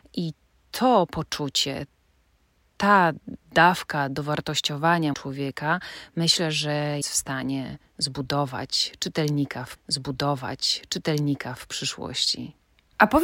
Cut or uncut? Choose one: cut